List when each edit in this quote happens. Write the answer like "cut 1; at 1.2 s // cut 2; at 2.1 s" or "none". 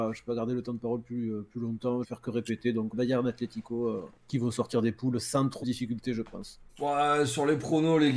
cut 1; at 2.0 s // cut 2; at 2.9 s // cut 3; at 4.2 s // cut 4; at 5.6 s // cut 5; at 6.7 s

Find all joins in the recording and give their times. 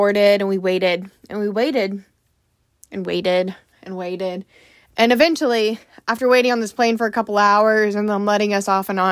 none

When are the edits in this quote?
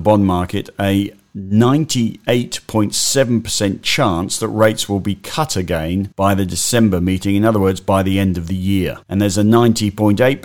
cut 1; at 6.1 s // cut 2; at 9.0 s

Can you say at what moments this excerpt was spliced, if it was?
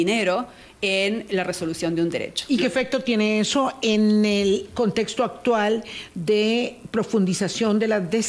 none

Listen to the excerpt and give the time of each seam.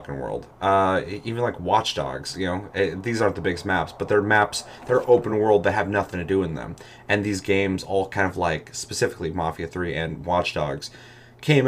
none

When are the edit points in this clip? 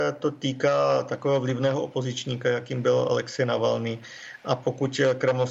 none

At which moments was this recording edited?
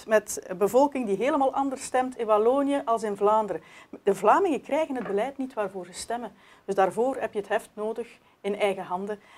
none

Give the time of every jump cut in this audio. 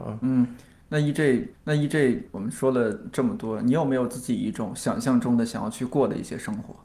cut 1; at 1.5 s

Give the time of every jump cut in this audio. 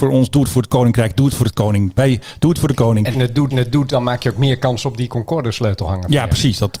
cut 1; at 3.1 s // cut 2; at 3.5 s

